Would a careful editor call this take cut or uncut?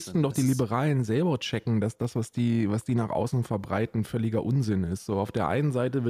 uncut